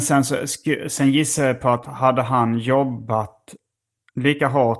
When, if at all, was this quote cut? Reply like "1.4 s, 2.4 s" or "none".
none